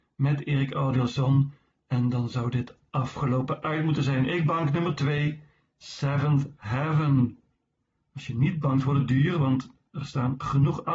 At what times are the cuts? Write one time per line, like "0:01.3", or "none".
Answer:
none